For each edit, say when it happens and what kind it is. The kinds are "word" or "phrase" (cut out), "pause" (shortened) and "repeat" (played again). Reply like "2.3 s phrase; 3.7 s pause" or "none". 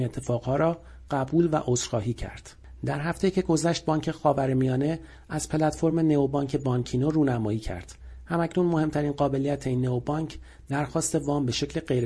none